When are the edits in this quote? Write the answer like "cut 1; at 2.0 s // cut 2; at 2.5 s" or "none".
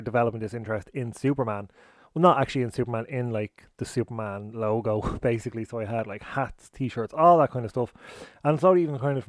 none

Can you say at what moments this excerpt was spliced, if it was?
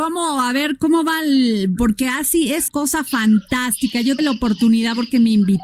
cut 1; at 2.7 s // cut 2; at 4.2 s

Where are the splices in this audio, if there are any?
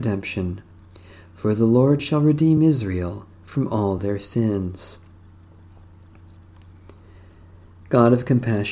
none

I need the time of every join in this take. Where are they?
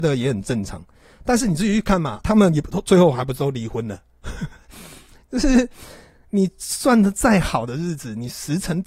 cut 1; at 2.2 s

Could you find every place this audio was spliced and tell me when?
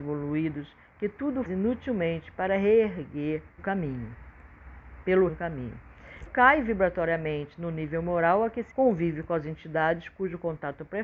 cut 1; at 1.4 s // cut 2; at 3.6 s // cut 3; at 5.3 s // cut 4; at 6.3 s // cut 5; at 8.7 s

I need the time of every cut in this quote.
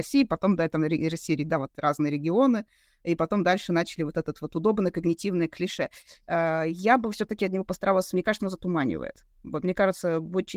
cut 1; at 9.3 s

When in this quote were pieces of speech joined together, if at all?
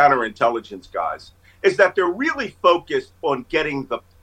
none

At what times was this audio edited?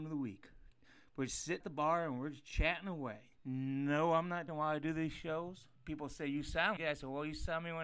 cut 1; at 1.6 s // cut 2; at 3.4 s // cut 3; at 4.5 s // cut 4; at 5.8 s // cut 5; at 6.8 s

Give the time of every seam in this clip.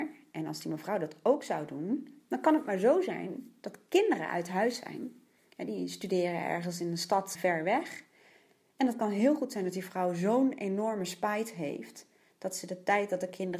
cut 1; at 7.3 s

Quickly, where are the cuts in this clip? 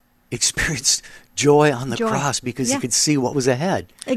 none

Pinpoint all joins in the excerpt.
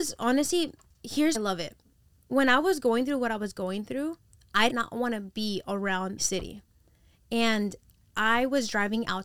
cut 1; at 1.3 s // cut 2; at 4.7 s // cut 3; at 6.2 s

